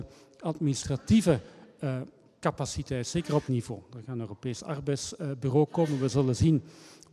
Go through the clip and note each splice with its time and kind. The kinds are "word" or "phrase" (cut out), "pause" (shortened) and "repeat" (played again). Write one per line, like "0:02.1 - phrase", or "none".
0:03.5 - word